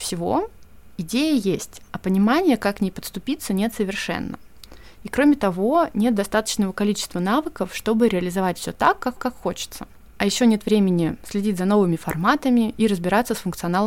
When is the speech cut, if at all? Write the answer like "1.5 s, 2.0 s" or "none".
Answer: 9.2 s